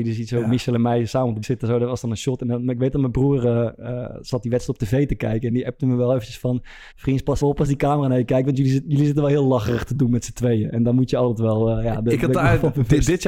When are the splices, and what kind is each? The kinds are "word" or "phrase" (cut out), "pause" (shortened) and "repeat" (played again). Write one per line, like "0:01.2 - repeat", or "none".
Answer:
0:01.4 - word
0:06.9 - pause
0:07.4 - word